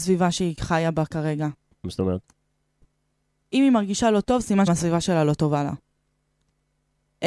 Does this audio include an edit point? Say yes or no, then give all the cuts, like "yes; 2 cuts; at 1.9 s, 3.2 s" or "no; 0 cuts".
yes; 1 cut; at 4.7 s